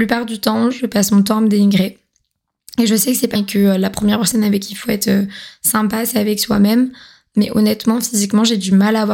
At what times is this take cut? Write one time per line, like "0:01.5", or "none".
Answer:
0:03.4

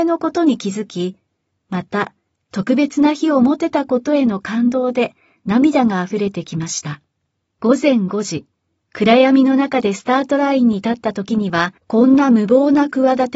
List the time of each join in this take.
0:07.2
0:11.8

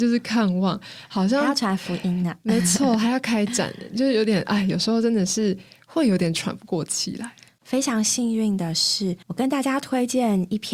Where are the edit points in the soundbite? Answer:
0:09.2

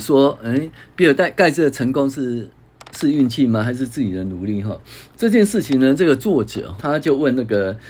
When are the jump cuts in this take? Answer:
0:06.8

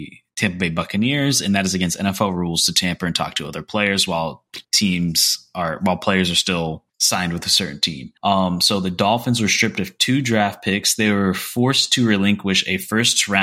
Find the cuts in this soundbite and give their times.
0:04.6
0:06.9
0:08.2

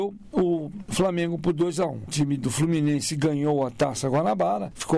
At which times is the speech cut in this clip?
0:02.1

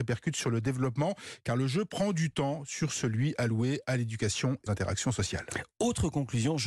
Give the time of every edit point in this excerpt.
0:04.7

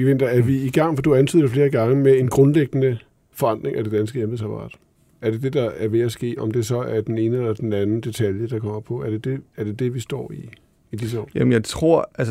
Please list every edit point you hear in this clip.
none

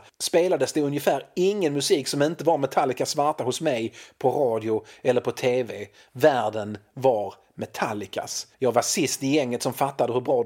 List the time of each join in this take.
0:08.5

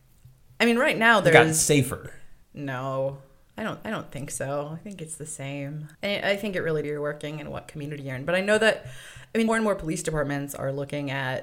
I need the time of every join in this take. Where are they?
0:02.4
0:03.8
0:05.9
0:06.8
0:09.5

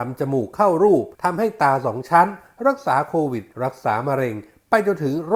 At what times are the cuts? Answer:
0:01.1
0:03.5

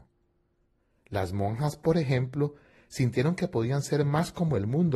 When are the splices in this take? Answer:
none

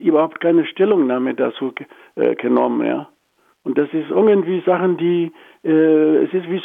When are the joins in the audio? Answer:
none

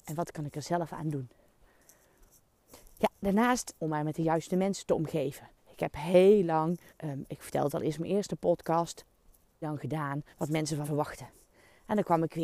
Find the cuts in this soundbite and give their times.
0:03.8
0:05.6
0:06.9
0:09.6
0:10.3
0:10.8

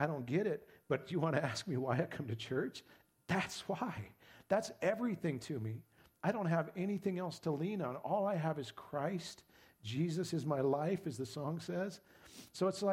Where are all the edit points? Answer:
none

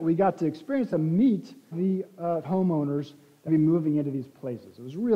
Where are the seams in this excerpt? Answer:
0:00.9
0:01.7
0:02.4
0:03.5

